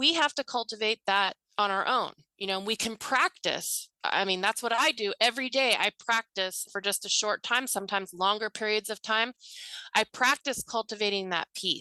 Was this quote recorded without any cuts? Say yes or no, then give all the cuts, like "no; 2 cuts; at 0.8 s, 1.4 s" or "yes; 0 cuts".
no; 3 cuts; at 1.4 s, 3.9 s, 6.7 s